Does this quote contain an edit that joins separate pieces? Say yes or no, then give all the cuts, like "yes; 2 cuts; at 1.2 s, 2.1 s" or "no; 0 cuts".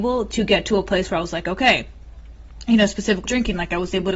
yes; 1 cut; at 3.2 s